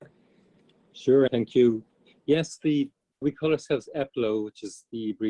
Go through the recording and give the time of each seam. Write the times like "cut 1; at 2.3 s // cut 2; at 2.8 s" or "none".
cut 1; at 1.3 s // cut 2; at 3.2 s